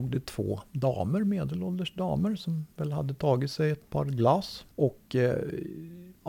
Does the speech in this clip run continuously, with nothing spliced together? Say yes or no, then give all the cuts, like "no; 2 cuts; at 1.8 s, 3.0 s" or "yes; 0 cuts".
yes; 0 cuts